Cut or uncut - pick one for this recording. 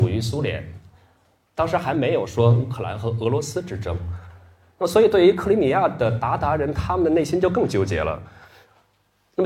uncut